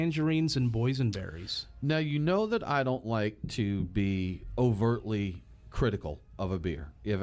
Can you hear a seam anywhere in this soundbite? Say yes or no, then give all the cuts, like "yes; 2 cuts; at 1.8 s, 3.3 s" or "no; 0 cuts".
no; 0 cuts